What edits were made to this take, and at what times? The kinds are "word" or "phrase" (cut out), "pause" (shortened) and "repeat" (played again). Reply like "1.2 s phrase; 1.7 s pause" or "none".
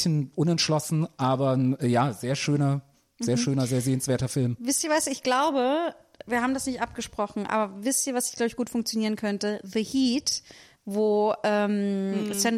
none